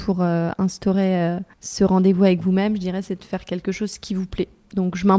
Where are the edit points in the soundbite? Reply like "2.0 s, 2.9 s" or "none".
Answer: 1.5 s